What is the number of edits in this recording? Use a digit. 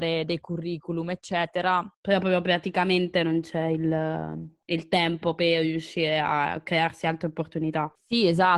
0